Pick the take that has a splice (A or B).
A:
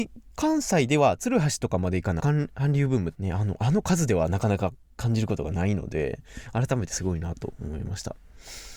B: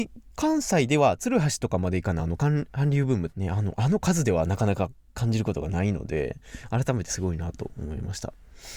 A